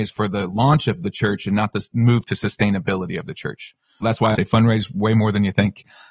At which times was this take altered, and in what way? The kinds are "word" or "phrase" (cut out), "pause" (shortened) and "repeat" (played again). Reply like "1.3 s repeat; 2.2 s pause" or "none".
4.0 s word; 4.3 s word